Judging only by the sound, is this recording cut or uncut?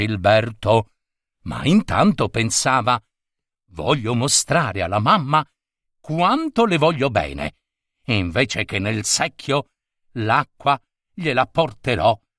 uncut